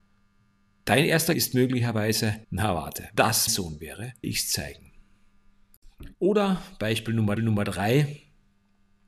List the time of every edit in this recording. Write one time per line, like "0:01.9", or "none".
0:01.3
0:02.4
0:03.2
0:03.5
0:04.2
0:06.1
0:07.4